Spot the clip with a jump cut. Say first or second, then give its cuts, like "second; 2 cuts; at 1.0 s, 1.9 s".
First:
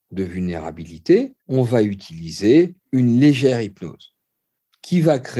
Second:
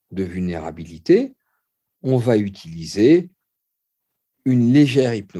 first; 2 cuts; at 1.4 s, 2.8 s